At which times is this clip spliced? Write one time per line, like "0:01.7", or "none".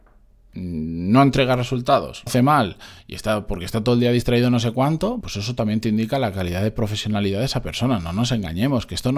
0:02.3
0:05.2